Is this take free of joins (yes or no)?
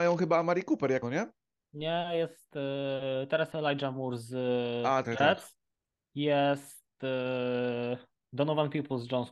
no